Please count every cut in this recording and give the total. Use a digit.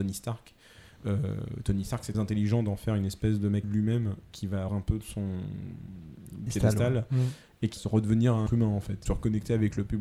7